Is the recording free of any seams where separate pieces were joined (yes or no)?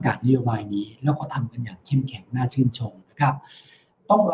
yes